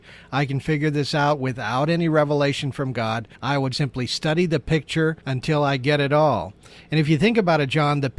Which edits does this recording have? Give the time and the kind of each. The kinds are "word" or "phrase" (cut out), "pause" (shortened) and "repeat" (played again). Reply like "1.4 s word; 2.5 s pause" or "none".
3.3 s pause; 3.7 s word; 5.2 s pause